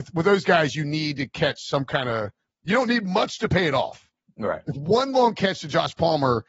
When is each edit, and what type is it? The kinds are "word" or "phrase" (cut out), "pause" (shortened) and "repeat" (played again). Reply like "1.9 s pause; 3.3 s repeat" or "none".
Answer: none